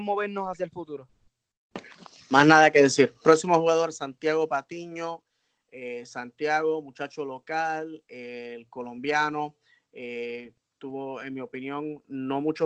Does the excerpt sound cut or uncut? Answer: uncut